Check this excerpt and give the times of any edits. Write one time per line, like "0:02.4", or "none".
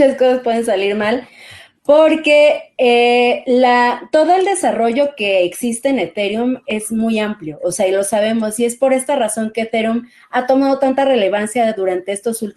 none